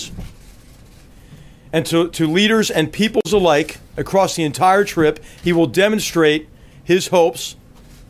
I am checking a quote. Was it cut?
no; 0 cuts

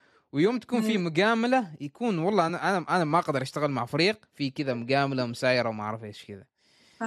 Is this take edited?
no; 0 cuts

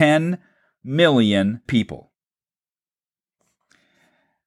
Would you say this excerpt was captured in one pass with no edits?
no; 1 cut; at 1.7 s

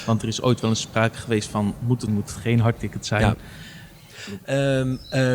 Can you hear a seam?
yes; 1 cut; at 2.1 s

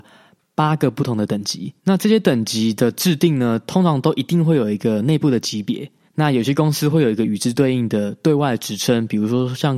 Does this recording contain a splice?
yes; 2 cuts; at 1.8 s, 6.1 s

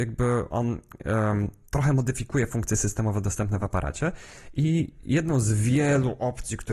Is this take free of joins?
yes; 0 cuts

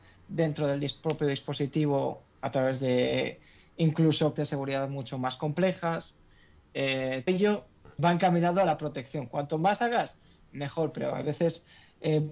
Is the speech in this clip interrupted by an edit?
yes; 3 cuts; at 4.4 s, 7.3 s, 8.0 s

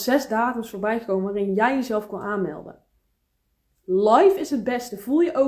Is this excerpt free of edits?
yes; 0 cuts

